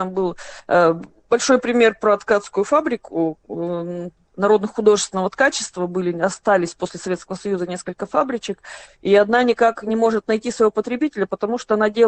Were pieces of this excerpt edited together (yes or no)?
no